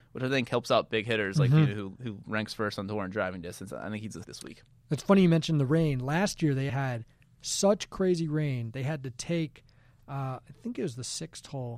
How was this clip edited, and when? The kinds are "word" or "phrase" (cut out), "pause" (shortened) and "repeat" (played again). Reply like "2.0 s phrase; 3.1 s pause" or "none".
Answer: 4.2 s phrase; 6.7 s word